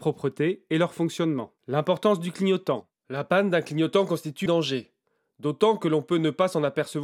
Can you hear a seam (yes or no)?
yes